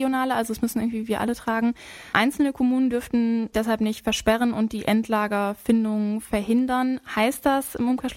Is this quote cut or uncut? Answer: cut